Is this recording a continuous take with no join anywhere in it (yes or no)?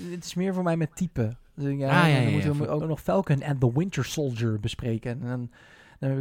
no